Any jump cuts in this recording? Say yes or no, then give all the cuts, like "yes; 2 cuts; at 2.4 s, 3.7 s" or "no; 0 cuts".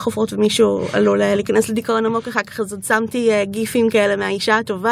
no; 0 cuts